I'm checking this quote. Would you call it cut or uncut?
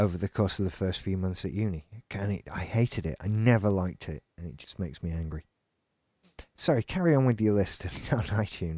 uncut